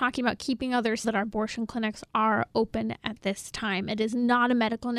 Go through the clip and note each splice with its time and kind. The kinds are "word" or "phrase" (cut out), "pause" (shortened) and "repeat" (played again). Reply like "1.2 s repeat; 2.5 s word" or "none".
1.0 s phrase